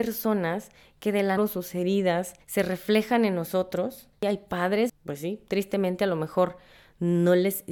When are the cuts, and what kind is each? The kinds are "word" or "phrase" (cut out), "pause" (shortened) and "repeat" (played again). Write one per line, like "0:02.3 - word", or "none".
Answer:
0:01.4 - phrase
0:02.4 - pause
0:04.1 - pause
0:04.9 - phrase